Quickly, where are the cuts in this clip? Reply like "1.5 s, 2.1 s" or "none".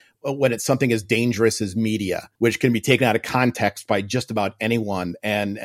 2.3 s